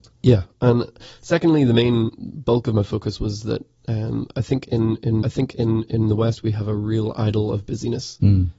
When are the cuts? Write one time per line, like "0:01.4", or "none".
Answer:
0:05.2